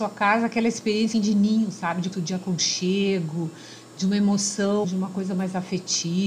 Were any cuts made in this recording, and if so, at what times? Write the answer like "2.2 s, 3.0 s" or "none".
1.1 s, 2.1 s, 4.8 s